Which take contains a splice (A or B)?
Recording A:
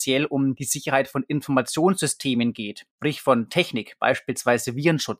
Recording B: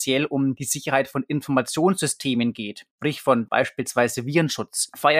B